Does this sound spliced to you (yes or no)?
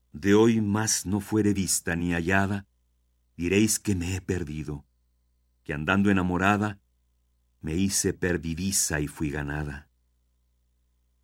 no